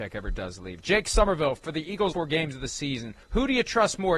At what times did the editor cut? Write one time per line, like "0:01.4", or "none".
0:02.1
0:03.2